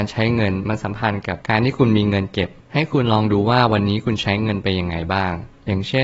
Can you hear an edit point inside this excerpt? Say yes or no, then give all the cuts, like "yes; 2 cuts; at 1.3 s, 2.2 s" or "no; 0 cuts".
yes; 1 cut; at 1.4 s